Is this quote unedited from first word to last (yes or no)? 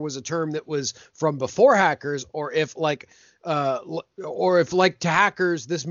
yes